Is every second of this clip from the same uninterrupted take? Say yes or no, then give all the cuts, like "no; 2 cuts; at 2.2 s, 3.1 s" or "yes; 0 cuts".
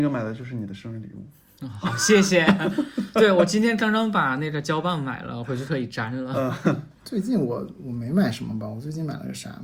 no; 1 cut; at 7.0 s